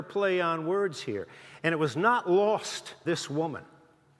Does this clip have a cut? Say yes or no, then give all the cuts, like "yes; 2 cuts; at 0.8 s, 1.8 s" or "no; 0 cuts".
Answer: yes; 1 cut; at 3.0 s